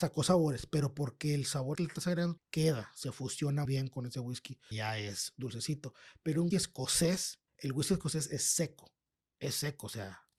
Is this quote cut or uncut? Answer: cut